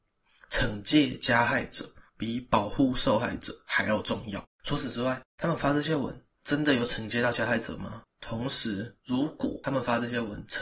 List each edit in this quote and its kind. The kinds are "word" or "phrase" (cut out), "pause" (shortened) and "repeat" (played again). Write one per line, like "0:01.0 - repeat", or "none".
0:02.1 - pause
0:09.0 - pause